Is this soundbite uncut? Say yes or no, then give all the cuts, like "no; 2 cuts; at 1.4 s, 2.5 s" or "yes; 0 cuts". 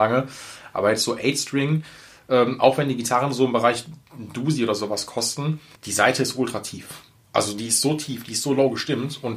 no; 1 cut; at 5.8 s